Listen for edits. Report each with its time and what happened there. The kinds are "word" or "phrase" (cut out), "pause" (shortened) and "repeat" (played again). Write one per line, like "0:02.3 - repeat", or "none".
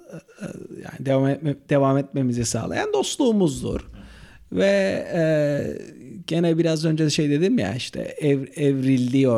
none